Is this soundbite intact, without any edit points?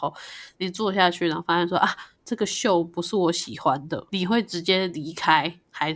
no; 1 cut; at 4.1 s

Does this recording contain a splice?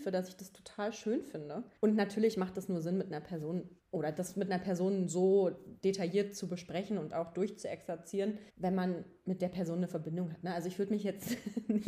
yes; 3 cuts; at 1.8 s, 3.8 s, 8.5 s

